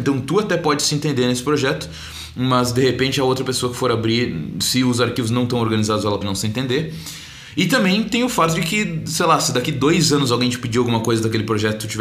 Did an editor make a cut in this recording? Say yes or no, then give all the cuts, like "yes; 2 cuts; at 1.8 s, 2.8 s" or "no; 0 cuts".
yes; 1 cut; at 6.2 s